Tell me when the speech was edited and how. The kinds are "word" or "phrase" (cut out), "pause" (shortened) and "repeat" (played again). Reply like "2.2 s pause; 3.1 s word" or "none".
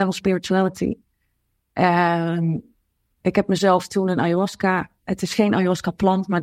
none

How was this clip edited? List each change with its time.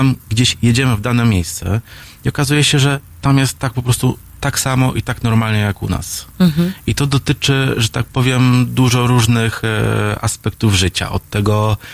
none

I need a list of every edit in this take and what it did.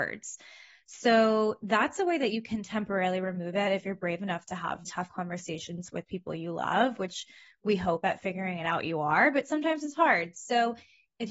4.8 s word

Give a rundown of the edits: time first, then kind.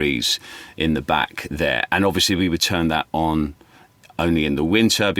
none

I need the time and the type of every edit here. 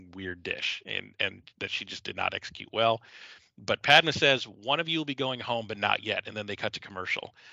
none

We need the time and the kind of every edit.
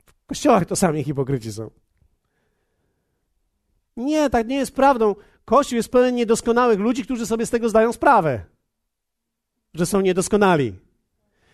none

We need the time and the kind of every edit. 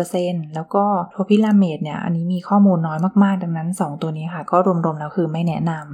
1.1 s pause

